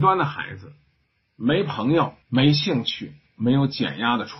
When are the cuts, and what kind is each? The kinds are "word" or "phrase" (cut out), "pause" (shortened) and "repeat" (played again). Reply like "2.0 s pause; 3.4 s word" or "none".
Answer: 2.2 s pause; 3.3 s phrase